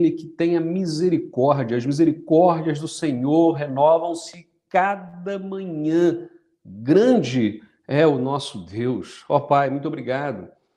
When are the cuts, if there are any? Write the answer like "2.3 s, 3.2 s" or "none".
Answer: none